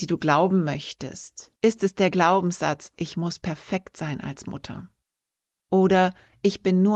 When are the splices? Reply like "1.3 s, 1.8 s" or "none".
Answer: 1.6 s